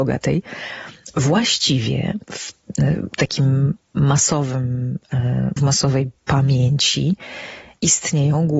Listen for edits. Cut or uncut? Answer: cut